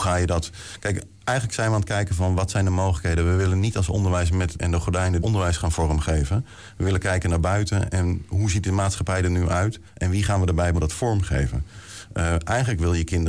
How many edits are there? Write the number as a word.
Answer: four